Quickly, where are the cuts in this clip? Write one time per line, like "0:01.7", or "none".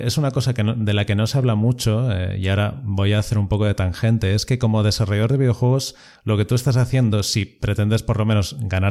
none